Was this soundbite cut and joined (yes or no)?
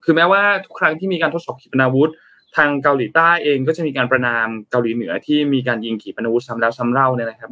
no